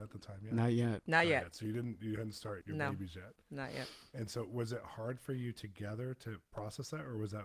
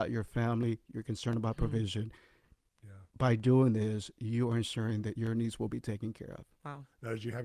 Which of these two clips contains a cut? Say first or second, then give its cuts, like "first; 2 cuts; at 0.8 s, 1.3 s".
first; 1 cut; at 2.6 s